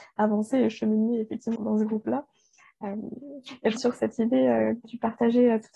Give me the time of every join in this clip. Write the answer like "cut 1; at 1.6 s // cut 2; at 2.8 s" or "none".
cut 1; at 1.6 s // cut 2; at 3.8 s // cut 3; at 4.8 s